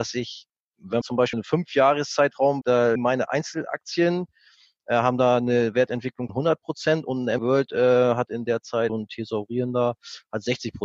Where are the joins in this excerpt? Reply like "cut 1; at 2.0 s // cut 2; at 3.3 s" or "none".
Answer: cut 1; at 1.0 s // cut 2; at 1.3 s // cut 3; at 2.6 s // cut 4; at 3.0 s // cut 5; at 6.3 s // cut 6; at 7.4 s // cut 7; at 8.9 s